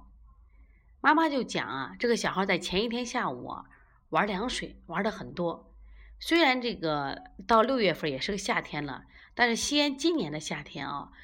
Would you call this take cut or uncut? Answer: uncut